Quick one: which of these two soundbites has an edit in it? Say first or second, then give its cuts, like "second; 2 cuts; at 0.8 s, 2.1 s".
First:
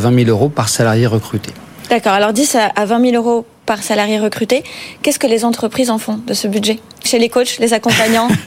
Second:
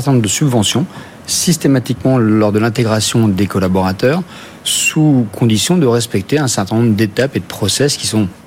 first; 1 cut; at 7.1 s